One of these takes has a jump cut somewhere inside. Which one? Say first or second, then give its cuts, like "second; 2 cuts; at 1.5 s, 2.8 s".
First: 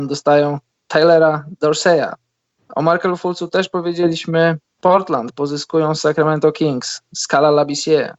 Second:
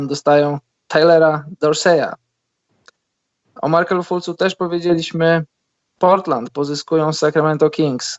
first; 2 cuts; at 2.5 s, 4.6 s